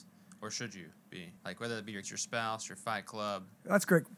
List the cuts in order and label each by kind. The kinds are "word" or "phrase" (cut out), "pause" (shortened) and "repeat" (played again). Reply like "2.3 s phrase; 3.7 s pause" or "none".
1.4 s pause; 2.0 s word

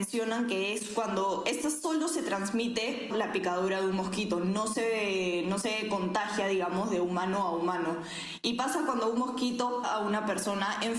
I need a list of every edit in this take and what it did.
3.1 s word; 9.8 s word

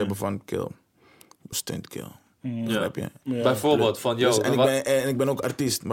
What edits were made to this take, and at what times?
1.5 s word

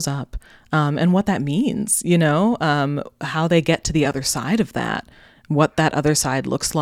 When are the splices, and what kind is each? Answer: none

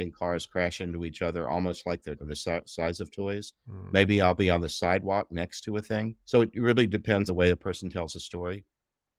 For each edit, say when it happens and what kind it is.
2.2 s word; 6.2 s pause; 7.3 s word

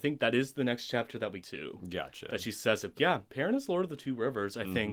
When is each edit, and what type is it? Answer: 1.4 s word; 2.9 s word; 3.3 s pause

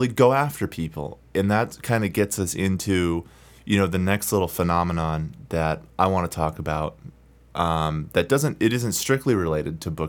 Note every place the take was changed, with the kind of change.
none

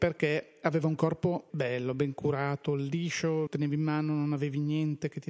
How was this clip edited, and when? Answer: 1.5 s word; 3.5 s word

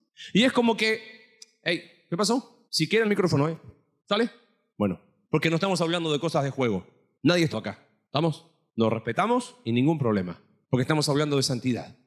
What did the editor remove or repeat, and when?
2.7 s pause; 3.0 s phrase; 7.5 s word

